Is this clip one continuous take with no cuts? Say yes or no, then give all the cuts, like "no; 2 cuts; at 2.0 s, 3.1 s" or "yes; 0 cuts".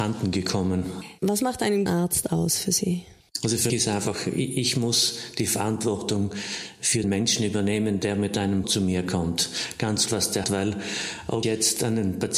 no; 7 cuts; at 1.9 s, 3.7 s, 7.0 s, 8.6 s, 10.1 s, 10.4 s, 11.4 s